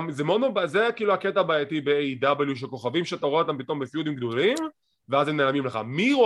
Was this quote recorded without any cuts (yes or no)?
yes